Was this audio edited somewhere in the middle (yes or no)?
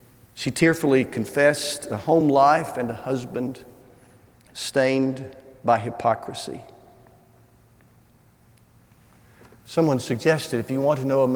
no